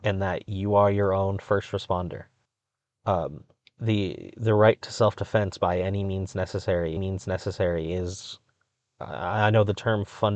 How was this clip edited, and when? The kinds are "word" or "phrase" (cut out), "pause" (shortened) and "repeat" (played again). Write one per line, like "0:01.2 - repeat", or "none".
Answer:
0:02.4 - pause
0:07.0 - repeat